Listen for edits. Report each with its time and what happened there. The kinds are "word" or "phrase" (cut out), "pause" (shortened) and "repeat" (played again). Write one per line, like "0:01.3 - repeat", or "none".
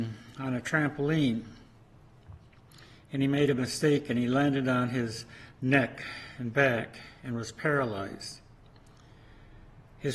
none